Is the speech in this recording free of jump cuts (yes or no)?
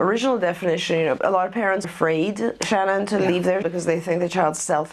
no